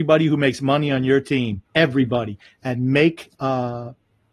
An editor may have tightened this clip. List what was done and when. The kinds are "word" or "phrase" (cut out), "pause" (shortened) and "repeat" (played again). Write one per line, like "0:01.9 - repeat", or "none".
0:01.7 - pause
0:03.4 - pause